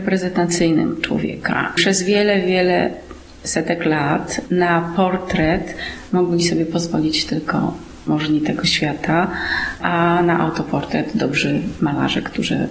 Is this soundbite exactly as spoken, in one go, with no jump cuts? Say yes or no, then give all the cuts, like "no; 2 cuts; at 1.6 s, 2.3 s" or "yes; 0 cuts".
yes; 0 cuts